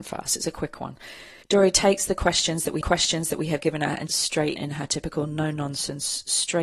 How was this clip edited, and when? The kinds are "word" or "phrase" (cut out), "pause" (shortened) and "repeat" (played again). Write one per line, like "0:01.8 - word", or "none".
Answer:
0:01.4 - pause
0:02.8 - repeat
0:04.1 - phrase
0:04.6 - word